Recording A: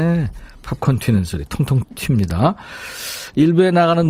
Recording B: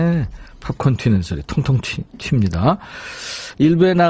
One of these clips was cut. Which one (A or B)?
A